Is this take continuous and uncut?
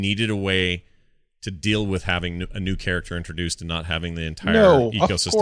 yes; 0 cuts

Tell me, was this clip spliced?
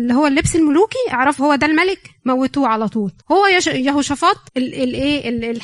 yes; 3 cuts; at 1.4 s, 3.2 s, 4.5 s

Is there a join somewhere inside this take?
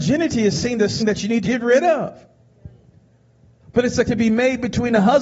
yes; 3 cuts; at 1.0 s, 1.4 s, 4.1 s

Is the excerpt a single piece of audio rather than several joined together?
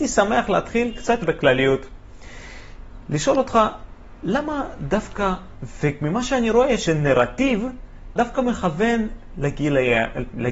no; 4 cuts; at 1.2 s, 5.5 s, 6.9 s, 8.2 s

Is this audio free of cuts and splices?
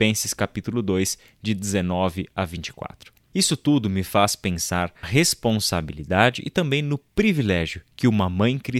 no; 1 cut; at 5.0 s

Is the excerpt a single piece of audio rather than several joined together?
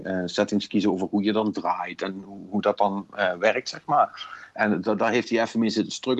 yes; 0 cuts

